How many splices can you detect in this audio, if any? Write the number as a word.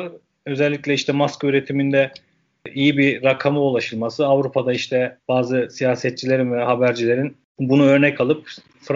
one